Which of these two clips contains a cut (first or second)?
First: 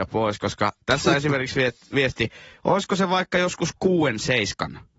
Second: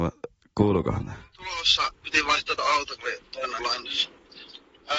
second